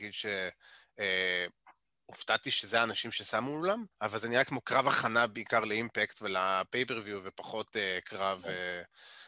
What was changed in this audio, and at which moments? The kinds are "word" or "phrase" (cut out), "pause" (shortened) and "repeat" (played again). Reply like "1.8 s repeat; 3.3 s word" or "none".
3.9 s pause

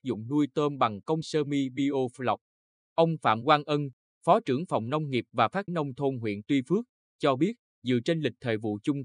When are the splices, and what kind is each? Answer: 1.2 s word; 5.7 s word

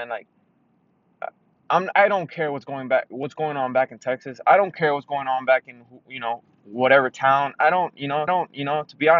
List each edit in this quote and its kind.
1.9 s word; 8.3 s repeat

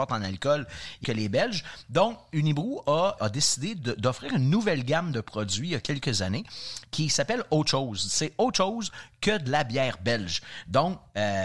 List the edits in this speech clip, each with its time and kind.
1.0 s phrase; 3.2 s word

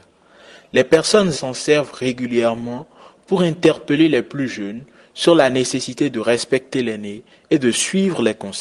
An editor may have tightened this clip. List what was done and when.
1.3 s word

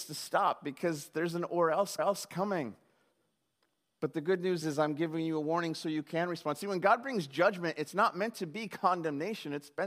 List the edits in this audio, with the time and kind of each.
2.0 s repeat; 4.6 s word

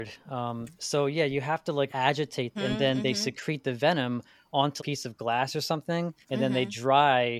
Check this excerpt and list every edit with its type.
1.9 s word; 2.6 s phrase; 4.8 s phrase; 6.2 s pause

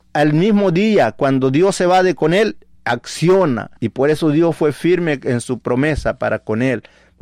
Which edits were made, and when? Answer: 3.8 s pause

